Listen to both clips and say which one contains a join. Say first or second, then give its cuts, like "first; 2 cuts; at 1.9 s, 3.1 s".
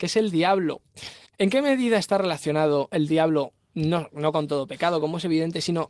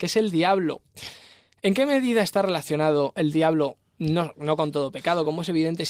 first; 1 cut; at 1.3 s